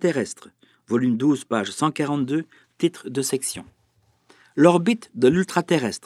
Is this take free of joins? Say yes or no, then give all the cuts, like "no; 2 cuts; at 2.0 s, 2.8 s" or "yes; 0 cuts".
yes; 0 cuts